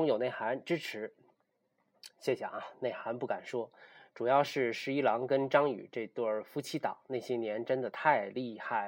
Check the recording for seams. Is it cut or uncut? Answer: uncut